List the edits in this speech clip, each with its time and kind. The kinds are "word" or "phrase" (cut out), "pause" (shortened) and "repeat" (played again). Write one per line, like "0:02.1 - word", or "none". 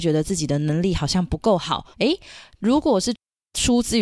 0:01.9 - pause